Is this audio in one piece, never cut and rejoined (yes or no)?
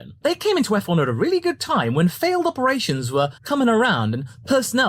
no